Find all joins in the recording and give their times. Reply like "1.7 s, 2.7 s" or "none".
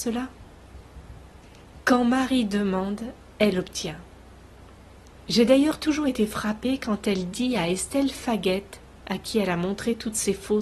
none